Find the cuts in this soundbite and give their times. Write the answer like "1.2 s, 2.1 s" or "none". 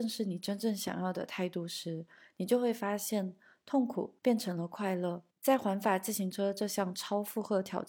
4.2 s, 5.3 s